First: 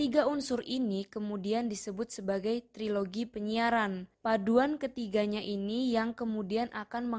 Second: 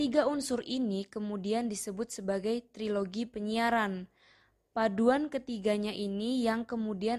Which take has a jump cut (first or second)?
first